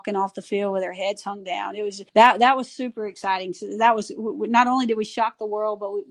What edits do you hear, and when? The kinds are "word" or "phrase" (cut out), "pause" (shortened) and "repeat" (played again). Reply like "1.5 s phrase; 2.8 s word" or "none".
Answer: 2.1 s pause